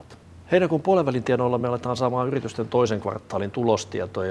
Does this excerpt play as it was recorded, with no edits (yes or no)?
yes